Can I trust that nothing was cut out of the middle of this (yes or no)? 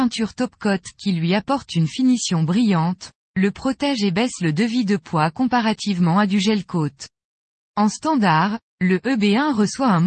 yes